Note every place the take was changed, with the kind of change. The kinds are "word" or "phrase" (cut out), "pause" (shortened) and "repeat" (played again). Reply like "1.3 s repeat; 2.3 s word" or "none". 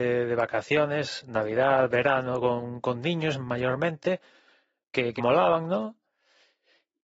5.2 s word